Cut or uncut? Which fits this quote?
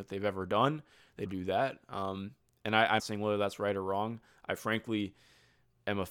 cut